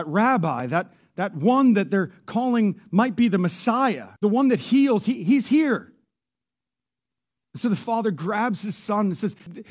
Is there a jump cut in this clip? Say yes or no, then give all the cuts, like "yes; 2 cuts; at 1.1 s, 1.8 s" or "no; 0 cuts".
yes; 1 cut; at 4.2 s